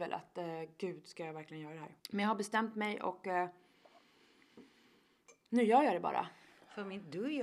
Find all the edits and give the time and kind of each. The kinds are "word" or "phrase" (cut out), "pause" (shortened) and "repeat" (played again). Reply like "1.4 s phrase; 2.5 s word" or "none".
2.0 s pause